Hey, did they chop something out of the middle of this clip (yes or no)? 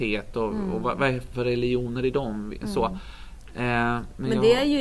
yes